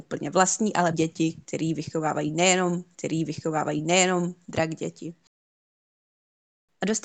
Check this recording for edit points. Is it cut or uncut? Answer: cut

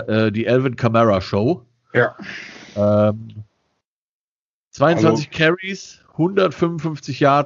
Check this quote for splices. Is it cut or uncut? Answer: uncut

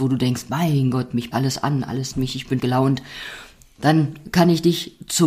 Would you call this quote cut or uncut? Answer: cut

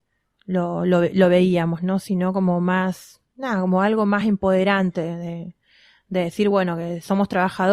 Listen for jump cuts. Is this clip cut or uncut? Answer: uncut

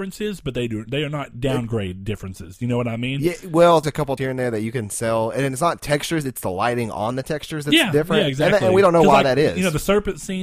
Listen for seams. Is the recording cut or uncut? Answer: cut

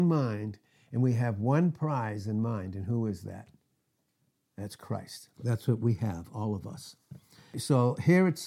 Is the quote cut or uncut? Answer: cut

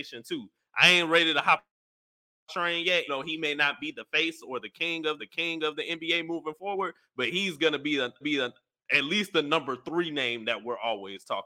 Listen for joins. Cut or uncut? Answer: cut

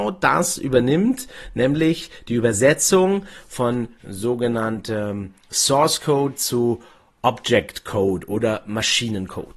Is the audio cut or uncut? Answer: uncut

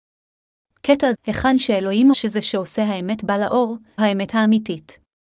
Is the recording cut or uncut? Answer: cut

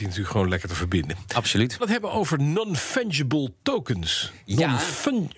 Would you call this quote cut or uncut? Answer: cut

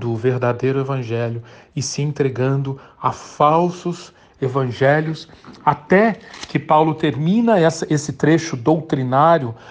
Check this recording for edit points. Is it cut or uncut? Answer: uncut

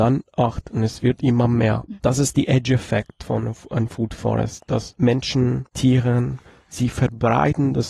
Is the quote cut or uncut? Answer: cut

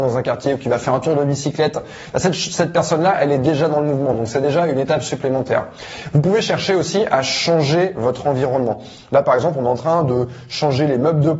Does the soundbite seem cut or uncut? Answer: uncut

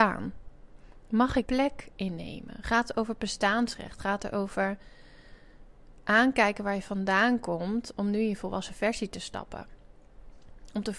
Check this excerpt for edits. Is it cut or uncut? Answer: cut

